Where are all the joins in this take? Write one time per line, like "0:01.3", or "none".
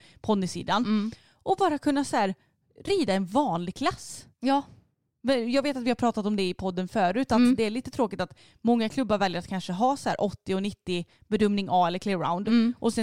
none